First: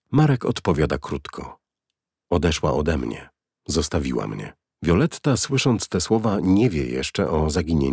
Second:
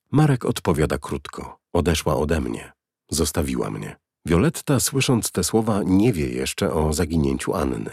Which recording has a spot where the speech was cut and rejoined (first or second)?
second